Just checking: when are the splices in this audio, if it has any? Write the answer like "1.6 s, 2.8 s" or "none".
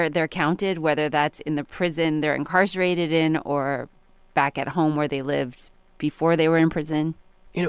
none

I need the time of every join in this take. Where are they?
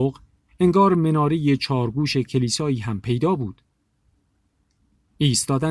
none

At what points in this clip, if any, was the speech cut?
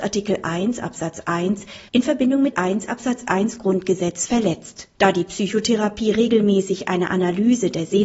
1.9 s, 2.5 s, 4.9 s

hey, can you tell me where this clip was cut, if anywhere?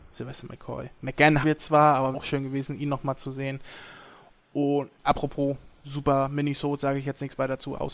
1.4 s, 2.1 s

